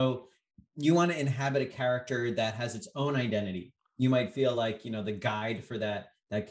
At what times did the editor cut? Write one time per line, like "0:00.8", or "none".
none